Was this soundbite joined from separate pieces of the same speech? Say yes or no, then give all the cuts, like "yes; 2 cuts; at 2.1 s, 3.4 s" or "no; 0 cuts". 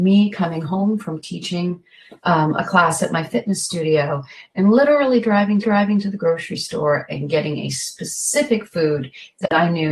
yes; 2 cuts; at 2.2 s, 5.6 s